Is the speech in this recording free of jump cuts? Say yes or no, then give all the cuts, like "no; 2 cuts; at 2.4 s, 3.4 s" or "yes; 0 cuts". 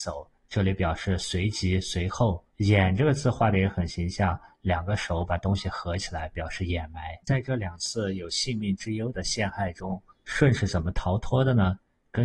no; 2 cuts; at 2.5 s, 7.2 s